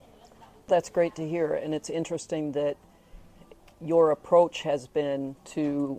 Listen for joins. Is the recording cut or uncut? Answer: uncut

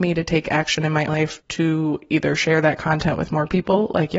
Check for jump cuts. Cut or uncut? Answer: cut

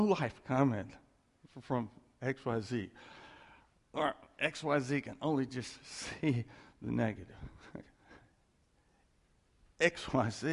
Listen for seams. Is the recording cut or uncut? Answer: uncut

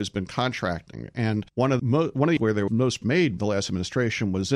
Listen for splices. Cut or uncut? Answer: cut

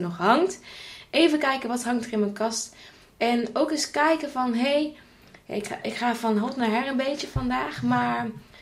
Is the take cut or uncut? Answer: uncut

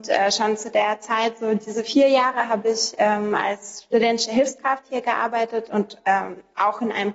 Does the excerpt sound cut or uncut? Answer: uncut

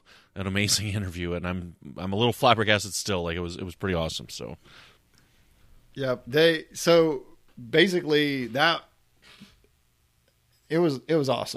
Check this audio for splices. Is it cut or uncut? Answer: uncut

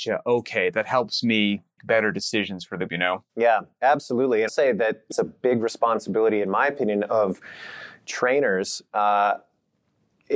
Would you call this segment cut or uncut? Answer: cut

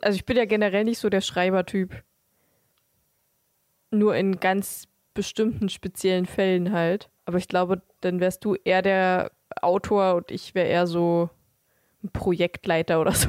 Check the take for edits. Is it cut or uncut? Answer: cut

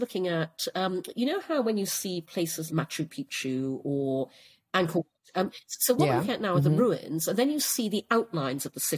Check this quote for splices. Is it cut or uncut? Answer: cut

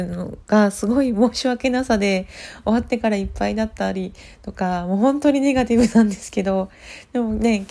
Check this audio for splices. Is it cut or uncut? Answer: uncut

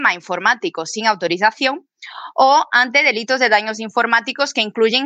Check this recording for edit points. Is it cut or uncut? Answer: uncut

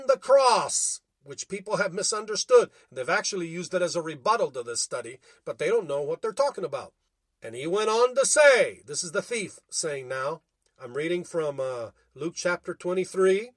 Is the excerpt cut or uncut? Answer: uncut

